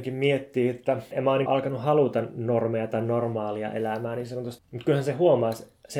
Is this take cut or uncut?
cut